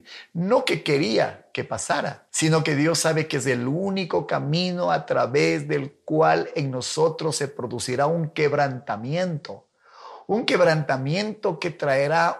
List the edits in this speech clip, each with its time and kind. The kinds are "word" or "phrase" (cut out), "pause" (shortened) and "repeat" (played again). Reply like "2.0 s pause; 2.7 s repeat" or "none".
2.3 s pause